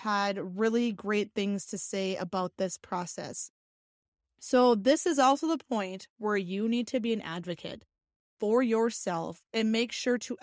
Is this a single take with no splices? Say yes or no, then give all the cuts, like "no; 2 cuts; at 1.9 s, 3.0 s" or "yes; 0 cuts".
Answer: yes; 0 cuts